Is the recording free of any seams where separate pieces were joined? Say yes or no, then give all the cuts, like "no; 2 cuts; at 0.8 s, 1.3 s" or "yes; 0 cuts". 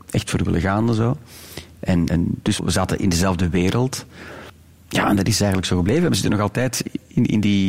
no; 2 cuts; at 2.1 s, 2.6 s